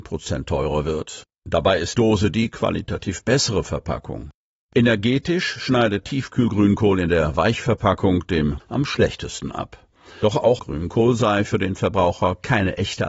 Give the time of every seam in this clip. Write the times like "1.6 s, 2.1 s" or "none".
1.9 s, 6.0 s, 8.6 s, 10.6 s